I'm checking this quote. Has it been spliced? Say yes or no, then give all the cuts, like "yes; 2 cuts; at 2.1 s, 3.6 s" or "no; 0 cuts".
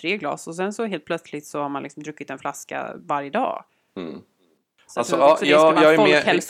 no; 0 cuts